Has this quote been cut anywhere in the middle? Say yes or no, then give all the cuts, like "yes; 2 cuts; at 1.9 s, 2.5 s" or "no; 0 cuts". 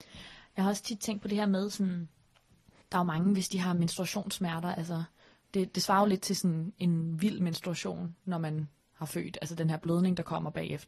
no; 0 cuts